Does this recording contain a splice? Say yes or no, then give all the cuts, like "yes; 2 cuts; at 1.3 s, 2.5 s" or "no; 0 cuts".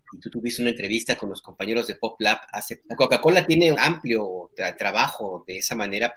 yes; 2 cuts; at 2.8 s, 3.7 s